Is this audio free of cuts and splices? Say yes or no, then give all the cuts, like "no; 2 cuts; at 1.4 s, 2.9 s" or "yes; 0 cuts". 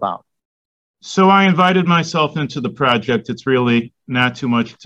yes; 0 cuts